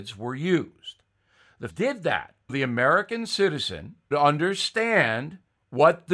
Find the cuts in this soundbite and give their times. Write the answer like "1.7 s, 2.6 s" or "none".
1.7 s, 2.5 s, 4.1 s